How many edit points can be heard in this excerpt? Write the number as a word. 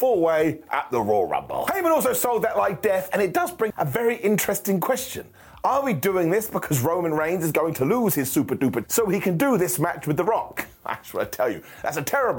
two